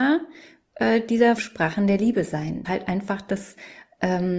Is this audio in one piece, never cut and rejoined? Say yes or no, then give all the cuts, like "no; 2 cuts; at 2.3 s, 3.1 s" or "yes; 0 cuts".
no; 2 cuts; at 1.4 s, 2.6 s